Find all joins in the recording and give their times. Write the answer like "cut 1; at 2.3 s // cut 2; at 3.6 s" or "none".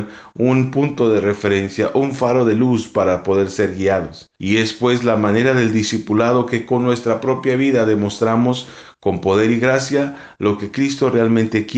cut 1; at 4.4 s